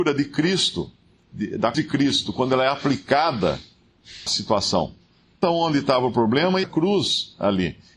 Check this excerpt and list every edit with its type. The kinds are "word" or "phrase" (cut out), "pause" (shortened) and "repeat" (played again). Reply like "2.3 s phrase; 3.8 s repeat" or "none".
1.7 s word; 4.3 s word; 5.4 s word; 6.6 s word